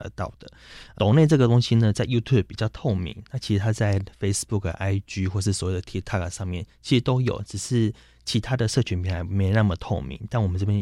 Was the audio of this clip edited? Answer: no; 0 cuts

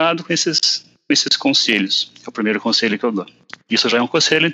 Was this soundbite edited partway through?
no; 0 cuts

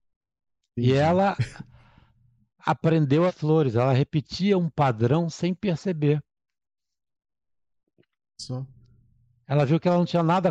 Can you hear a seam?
yes; 1 cut; at 3.3 s

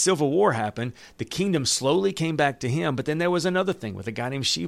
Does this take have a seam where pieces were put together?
no; 0 cuts

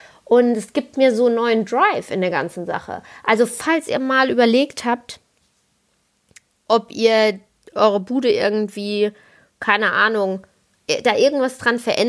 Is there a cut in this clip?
no; 0 cuts

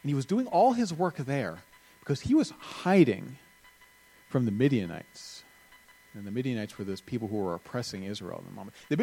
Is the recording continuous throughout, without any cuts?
yes; 0 cuts

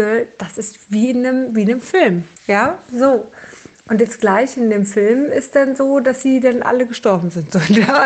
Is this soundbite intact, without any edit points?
no; 1 cut; at 2.4 s

